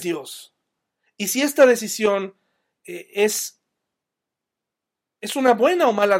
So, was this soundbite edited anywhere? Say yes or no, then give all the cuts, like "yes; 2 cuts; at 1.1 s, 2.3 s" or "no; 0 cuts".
no; 0 cuts